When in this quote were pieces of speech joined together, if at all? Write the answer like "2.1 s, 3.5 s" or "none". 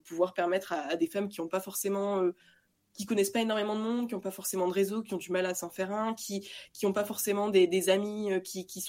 none

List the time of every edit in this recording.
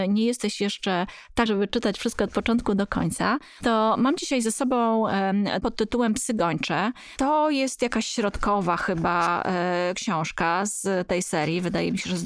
1.5 s, 5.6 s

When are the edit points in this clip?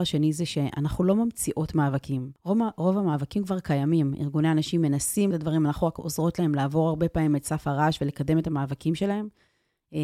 2.4 s, 5.3 s

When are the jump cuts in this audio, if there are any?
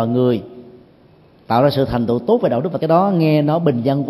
2.8 s

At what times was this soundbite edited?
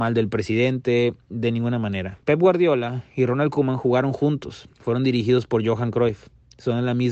2.2 s, 4.7 s

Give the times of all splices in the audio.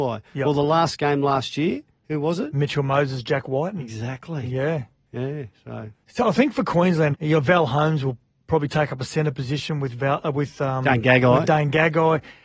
6.2 s, 7.1 s

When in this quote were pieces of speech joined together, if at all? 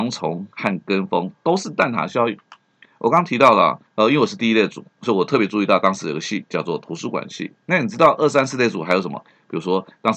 3.9 s

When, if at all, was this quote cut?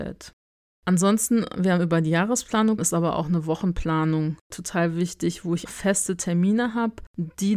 2.8 s, 5.7 s

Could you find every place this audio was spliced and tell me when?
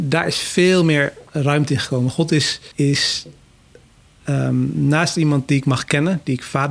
1.3 s, 2.7 s

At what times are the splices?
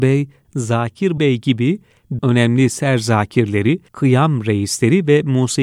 1.2 s, 2.2 s, 3.9 s

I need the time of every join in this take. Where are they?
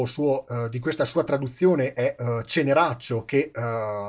none

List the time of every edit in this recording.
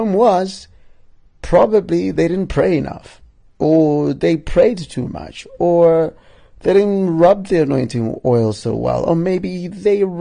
none

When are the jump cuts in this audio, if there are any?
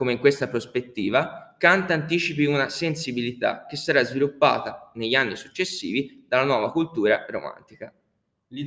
none

